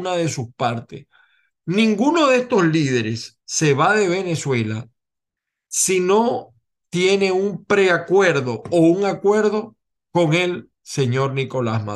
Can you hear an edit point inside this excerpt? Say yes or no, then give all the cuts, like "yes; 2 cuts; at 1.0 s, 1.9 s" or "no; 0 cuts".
yes; 1 cut; at 3.4 s